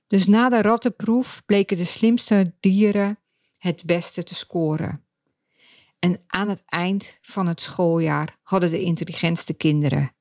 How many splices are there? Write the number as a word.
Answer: zero